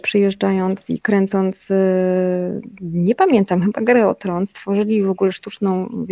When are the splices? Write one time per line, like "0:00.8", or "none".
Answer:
none

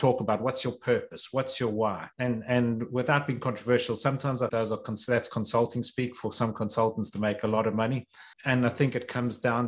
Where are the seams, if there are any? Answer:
0:02.1
0:04.5
0:08.3

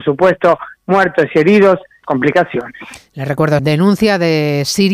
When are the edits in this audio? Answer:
0:02.0
0:03.6

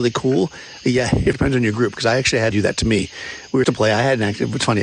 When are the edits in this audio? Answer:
0:01.3
0:02.5
0:03.6

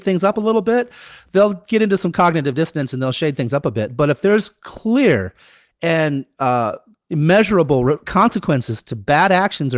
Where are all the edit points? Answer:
none

